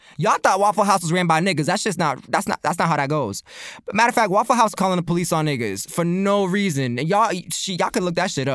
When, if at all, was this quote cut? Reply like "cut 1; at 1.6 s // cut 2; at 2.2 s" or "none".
cut 1; at 4.8 s